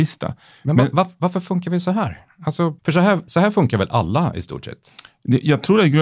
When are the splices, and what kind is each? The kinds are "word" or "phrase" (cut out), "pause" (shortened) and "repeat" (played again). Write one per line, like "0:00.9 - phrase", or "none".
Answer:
0:02.8 - pause